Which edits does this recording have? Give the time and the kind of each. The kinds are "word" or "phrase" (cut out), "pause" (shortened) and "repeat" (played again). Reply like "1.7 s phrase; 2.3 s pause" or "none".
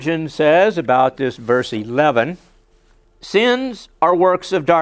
1.4 s word; 2.7 s pause

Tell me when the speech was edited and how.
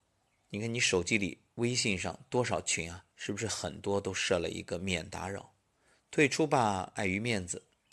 3.1 s pause

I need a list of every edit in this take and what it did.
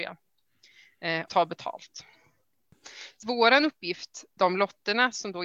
1.3 s word; 3.2 s word; 4.4 s word

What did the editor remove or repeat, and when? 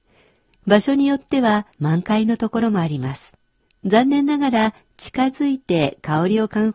1.7 s pause; 3.5 s pause

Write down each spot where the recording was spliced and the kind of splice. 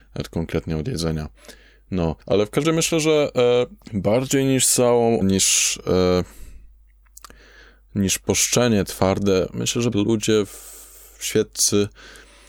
2.2 s pause; 2.6 s word; 3.8 s pause; 5.2 s word; 8.8 s word; 9.9 s phrase

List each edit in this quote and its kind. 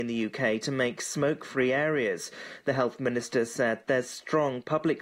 none

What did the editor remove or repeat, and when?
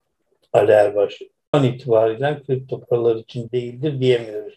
1.5 s word; 3.5 s word

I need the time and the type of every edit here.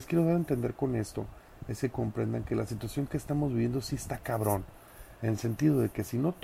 none

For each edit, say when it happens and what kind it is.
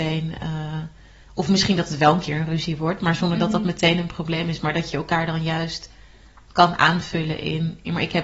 none

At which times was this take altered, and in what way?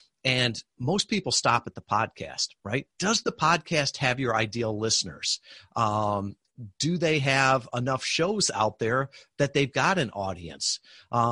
2.9 s pause

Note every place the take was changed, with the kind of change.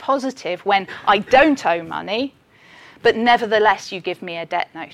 none

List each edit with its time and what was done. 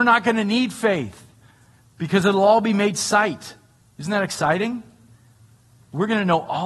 3.8 s pause

